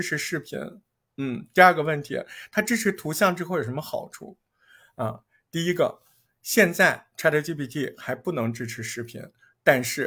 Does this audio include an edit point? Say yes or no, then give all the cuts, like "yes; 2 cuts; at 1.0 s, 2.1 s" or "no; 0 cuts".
no; 0 cuts